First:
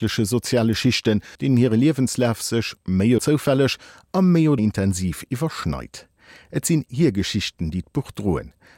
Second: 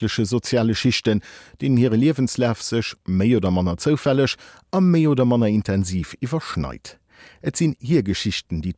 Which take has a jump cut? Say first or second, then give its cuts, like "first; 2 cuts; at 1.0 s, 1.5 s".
first; 3 cuts; at 1.3 s, 3.2 s, 4.6 s